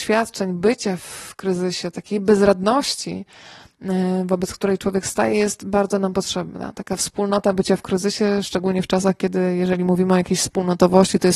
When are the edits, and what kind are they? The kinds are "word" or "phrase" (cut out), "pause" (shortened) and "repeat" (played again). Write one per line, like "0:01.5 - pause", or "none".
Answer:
none